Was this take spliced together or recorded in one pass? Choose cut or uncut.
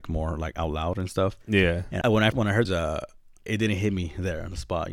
cut